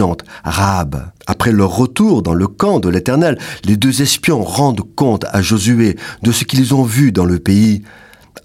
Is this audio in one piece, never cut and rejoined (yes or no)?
no